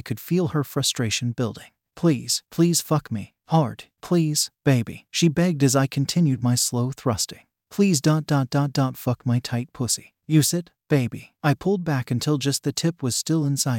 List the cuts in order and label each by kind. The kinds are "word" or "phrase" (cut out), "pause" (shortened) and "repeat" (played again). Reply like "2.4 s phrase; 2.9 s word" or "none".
none